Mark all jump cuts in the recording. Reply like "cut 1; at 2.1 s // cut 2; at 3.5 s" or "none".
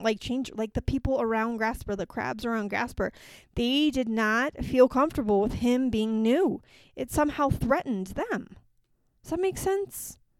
none